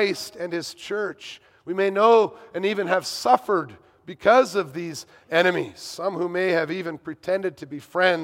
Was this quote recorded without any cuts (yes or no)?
yes